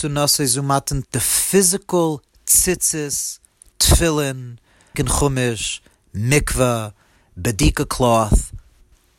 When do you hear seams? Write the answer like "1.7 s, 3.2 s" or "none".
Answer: 1.0 s, 4.9 s